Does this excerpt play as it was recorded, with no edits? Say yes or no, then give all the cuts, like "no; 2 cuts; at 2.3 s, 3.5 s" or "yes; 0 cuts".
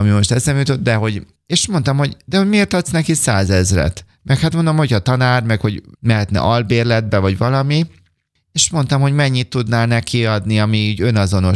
yes; 0 cuts